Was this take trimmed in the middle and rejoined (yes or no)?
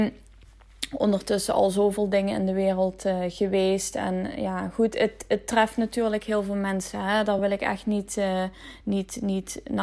no